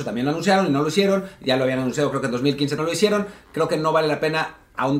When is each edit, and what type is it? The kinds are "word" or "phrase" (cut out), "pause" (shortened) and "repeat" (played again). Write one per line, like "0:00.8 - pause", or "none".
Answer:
0:02.8 - word